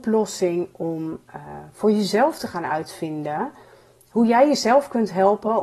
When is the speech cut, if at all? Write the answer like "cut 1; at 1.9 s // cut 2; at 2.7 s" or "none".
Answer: none

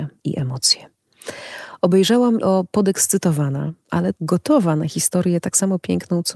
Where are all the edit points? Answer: cut 1; at 2.4 s // cut 2; at 4.1 s

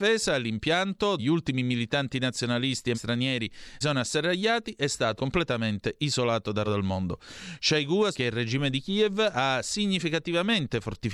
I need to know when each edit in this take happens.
cut 1; at 1.2 s // cut 2; at 2.9 s // cut 3; at 3.8 s // cut 4; at 5.2 s // cut 5; at 6.6 s // cut 6; at 8.1 s

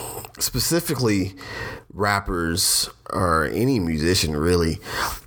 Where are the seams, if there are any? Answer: none

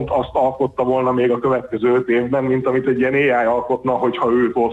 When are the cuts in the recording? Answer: none

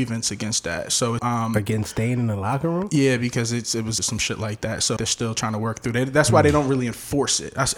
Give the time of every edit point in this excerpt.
cut 1; at 1.2 s // cut 2; at 4.0 s // cut 3; at 5.0 s

